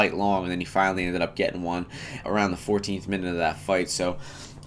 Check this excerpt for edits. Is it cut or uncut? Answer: cut